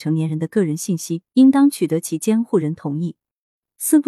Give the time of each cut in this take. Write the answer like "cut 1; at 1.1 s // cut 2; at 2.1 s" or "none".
cut 1; at 1.3 s